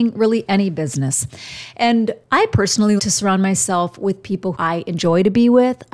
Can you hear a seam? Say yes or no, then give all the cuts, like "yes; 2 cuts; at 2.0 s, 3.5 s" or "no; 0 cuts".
yes; 3 cuts; at 2.2 s, 3.0 s, 4.5 s